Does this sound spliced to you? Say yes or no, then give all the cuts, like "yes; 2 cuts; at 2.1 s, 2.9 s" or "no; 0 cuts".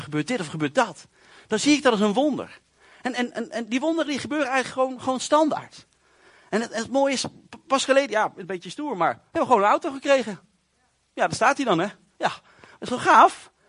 no; 0 cuts